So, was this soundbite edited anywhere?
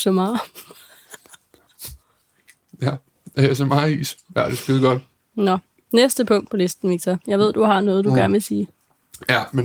no; 0 cuts

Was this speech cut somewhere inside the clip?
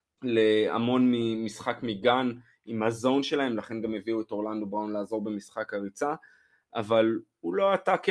no; 0 cuts

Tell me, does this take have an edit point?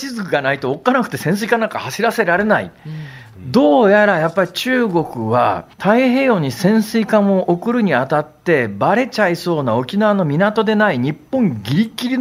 yes; 1 cut; at 5.7 s

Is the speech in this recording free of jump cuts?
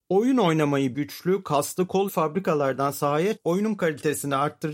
no; 3 cuts; at 0.9 s, 2.1 s, 3.4 s

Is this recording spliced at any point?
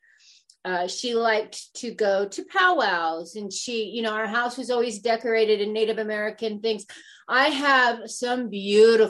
no; 0 cuts

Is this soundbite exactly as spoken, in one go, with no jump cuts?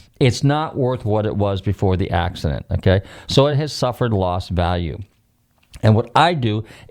yes; 0 cuts

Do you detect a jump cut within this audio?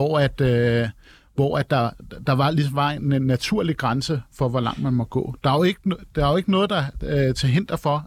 no; 0 cuts

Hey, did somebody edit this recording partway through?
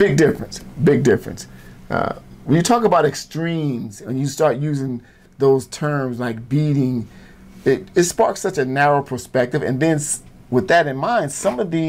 no; 0 cuts

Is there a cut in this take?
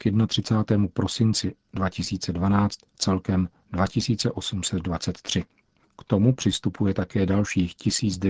no; 0 cuts

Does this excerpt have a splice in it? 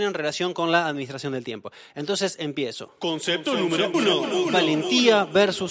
yes; 1 cut; at 3.9 s

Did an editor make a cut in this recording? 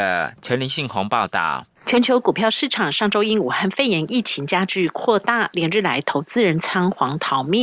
yes; 1 cut; at 1.8 s

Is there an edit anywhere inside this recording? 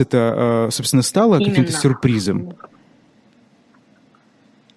no; 0 cuts

